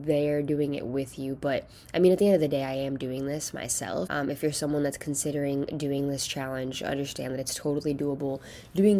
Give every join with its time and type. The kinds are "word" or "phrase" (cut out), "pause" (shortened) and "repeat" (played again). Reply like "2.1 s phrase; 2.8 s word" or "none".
4.1 s word